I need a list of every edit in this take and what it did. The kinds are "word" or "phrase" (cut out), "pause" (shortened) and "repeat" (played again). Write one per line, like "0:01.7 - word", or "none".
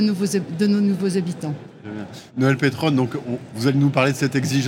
0:02.3 - pause